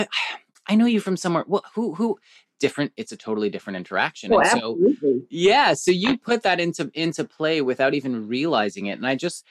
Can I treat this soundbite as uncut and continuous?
yes; 0 cuts

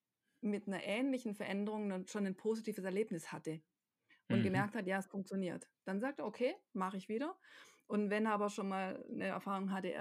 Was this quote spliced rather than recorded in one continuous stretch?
no; 0 cuts

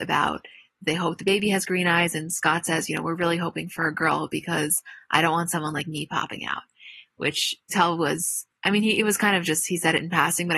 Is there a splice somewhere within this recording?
yes; 2 cuts; at 7.7 s, 8.5 s

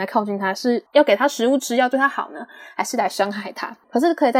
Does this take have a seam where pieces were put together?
no; 0 cuts

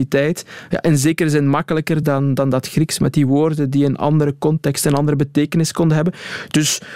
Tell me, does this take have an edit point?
no; 0 cuts

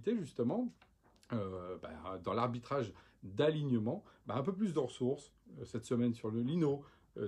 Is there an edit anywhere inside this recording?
no; 0 cuts

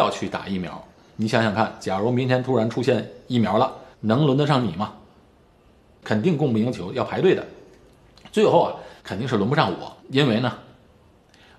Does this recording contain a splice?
yes; 4 cuts; at 0.9 s, 3.9 s, 9.0 s, 10.0 s

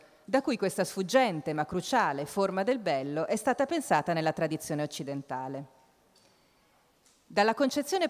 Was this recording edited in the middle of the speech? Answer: no; 0 cuts

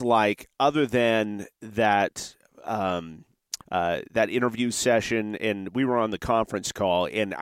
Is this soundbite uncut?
no; 1 cut; at 3.6 s

